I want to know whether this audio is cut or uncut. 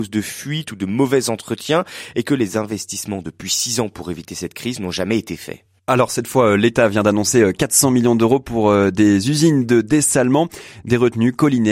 uncut